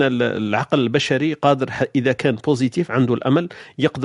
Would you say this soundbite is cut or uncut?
uncut